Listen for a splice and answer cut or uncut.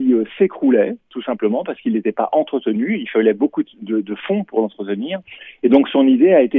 uncut